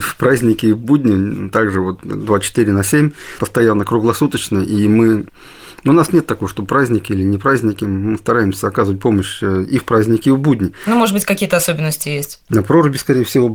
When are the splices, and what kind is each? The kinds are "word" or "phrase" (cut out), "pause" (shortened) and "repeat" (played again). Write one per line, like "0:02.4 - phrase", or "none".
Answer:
none